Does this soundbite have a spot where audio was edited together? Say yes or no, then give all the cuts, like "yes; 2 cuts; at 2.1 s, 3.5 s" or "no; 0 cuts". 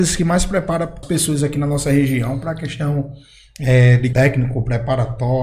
yes; 2 cuts; at 1.0 s, 4.1 s